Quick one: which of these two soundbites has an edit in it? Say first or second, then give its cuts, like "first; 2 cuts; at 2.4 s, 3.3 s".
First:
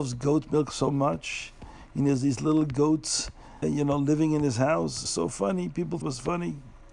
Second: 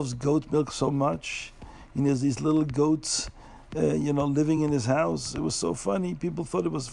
first; 3 cuts; at 3.6 s, 5.1 s, 6.0 s